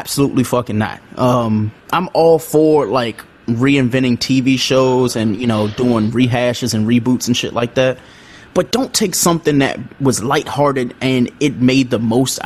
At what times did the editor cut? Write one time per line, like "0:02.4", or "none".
0:01.8

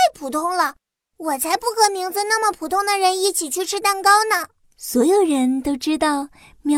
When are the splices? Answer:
none

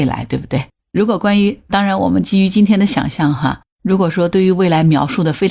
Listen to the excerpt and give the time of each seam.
0:03.7

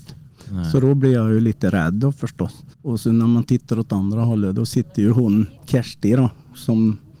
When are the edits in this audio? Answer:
0:02.7
0:05.6

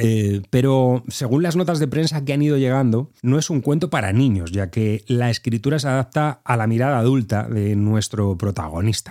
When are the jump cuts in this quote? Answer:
0:03.2

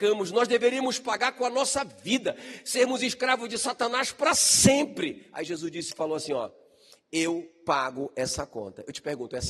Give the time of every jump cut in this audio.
none

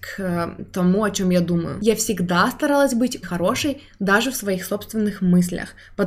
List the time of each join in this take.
0:03.2

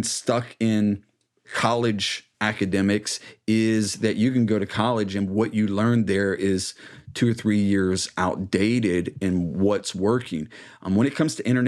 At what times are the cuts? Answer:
0:02.3

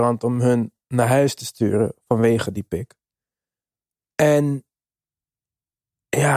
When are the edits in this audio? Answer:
none

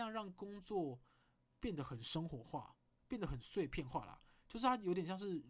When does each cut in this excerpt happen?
none

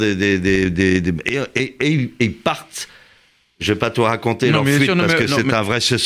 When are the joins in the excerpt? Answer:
none

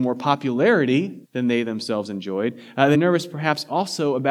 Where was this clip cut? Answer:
0:01.2
0:02.9

